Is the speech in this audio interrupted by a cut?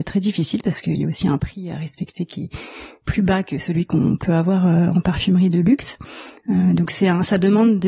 no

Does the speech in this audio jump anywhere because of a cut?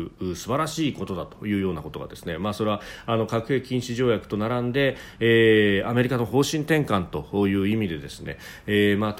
no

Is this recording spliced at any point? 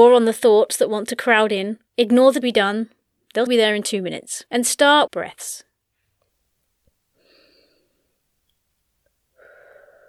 yes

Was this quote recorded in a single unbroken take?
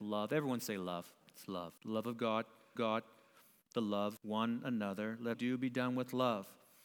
no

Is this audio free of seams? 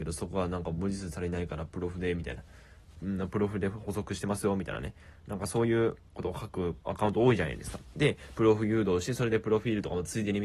no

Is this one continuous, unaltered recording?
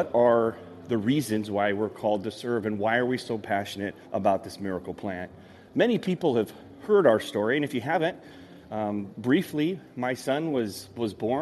no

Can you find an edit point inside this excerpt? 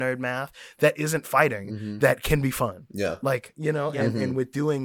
no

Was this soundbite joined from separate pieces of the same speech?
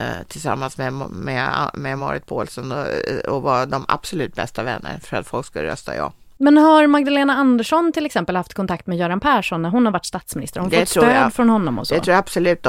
no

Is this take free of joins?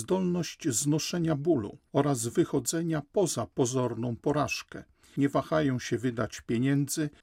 yes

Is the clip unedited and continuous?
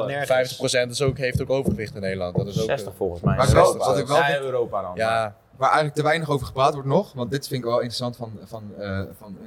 yes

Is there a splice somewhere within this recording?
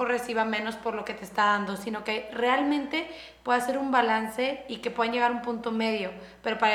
no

